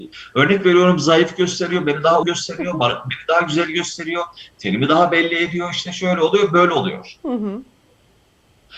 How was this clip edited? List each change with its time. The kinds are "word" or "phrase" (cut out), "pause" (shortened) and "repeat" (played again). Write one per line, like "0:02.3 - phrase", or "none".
0:02.2 - word